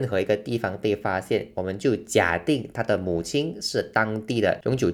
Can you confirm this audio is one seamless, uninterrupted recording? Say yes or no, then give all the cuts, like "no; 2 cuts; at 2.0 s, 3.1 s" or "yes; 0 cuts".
yes; 0 cuts